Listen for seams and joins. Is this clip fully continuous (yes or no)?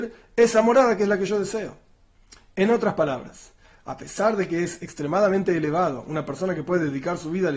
yes